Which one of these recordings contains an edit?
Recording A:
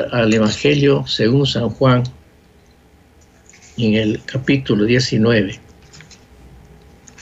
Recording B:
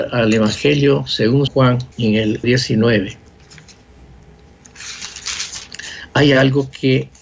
B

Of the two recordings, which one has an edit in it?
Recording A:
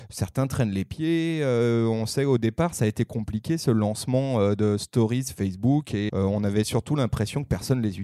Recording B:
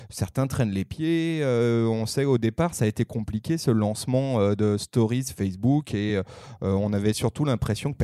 A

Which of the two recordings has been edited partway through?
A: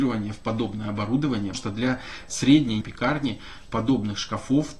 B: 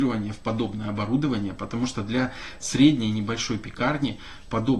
A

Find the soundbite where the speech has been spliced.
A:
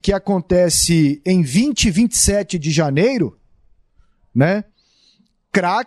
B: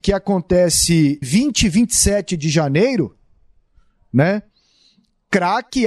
B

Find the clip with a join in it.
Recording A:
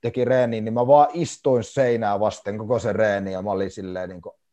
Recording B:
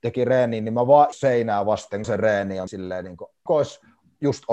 B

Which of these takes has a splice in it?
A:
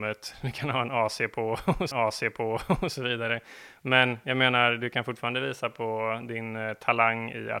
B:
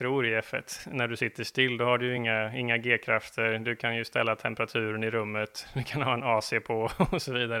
A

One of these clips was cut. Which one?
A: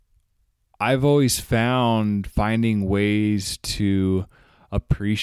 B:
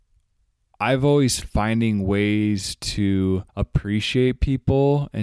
B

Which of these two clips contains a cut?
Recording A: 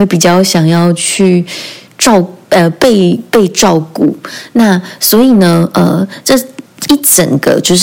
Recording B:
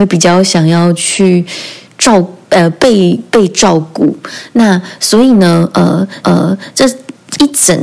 B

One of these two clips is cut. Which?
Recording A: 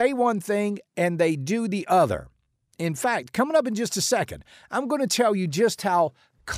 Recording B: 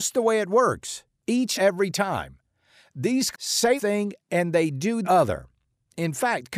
B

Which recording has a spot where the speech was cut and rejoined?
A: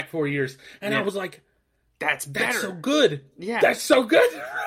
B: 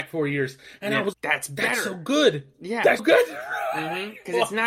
B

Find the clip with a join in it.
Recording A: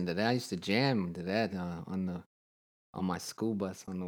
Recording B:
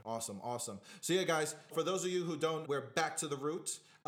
B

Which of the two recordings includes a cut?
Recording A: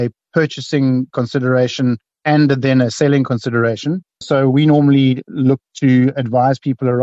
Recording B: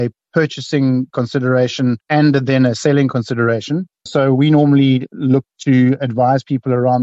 B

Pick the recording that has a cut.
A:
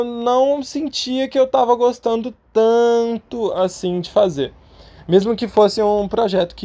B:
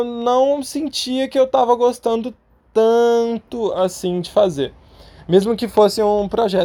A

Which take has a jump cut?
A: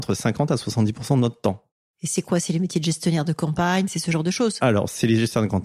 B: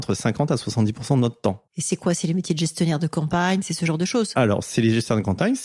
B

